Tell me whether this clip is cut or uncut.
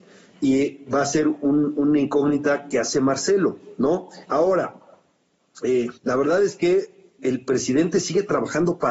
cut